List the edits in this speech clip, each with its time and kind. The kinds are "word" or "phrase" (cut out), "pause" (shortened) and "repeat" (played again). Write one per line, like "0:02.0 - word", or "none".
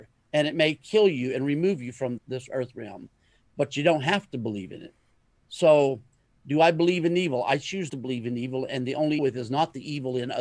0:02.2 - word
0:07.9 - word
0:09.2 - phrase